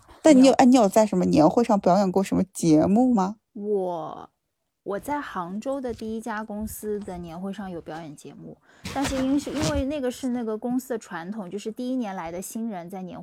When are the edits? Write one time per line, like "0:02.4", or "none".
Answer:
0:03.4